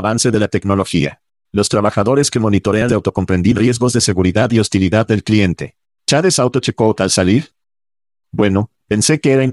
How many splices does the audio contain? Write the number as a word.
two